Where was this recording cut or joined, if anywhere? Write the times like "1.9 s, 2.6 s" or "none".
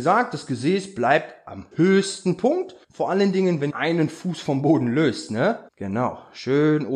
1.7 s, 2.8 s, 3.7 s, 5.7 s